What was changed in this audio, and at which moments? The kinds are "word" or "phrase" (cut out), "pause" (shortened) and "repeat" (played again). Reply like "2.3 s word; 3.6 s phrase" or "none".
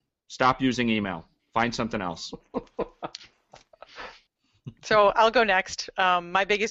none

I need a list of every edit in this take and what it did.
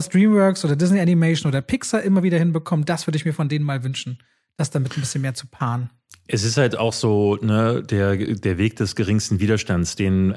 none

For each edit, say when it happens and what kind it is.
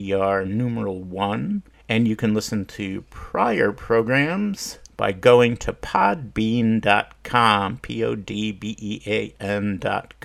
1.7 s pause; 4.8 s pause

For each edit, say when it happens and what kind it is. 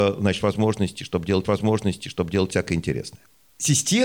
1.4 s repeat

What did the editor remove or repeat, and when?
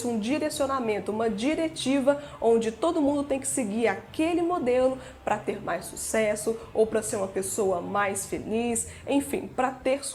none

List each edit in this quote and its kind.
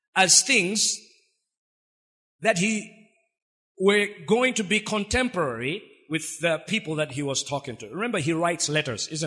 none

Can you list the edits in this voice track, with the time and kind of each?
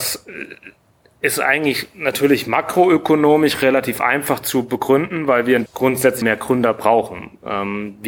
5.7 s word; 6.2 s word

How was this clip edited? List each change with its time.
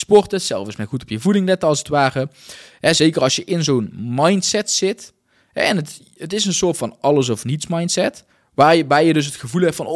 8.3 s pause

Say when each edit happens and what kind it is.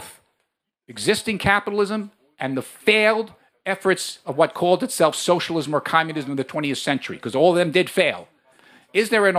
none

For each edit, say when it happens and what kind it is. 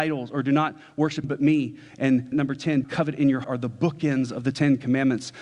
1.2 s word; 2.3 s word; 2.8 s word; 3.4 s word

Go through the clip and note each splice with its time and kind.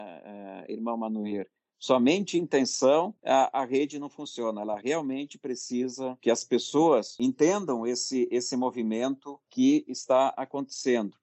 none

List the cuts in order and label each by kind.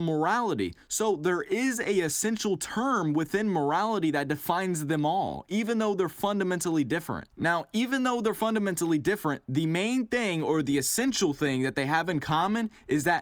7.3 s pause

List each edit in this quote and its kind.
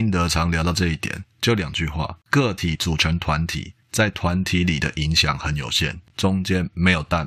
1.3 s pause; 2.2 s pause; 3.8 s pause; 6.1 s pause

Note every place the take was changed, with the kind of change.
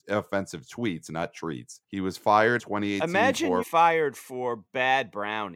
1.8 s pause; 2.6 s word; 3.6 s phrase

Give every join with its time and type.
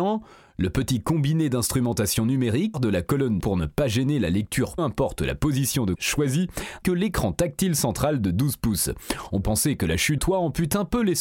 2.7 s word; 3.4 s word; 4.8 s word; 5.9 s word; 6.8 s word; 9.4 s word; 10.2 s word

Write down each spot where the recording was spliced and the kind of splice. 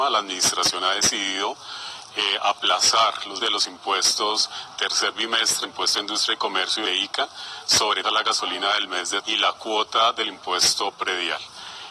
3.4 s word; 4.8 s word; 5.6 s word; 6.9 s word; 8.0 s word; 9.2 s word

